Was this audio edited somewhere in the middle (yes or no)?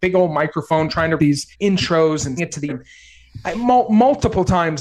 yes